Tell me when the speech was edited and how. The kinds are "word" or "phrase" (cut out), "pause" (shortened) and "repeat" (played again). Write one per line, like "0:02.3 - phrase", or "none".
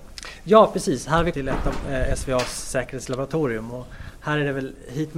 0:01.3 - word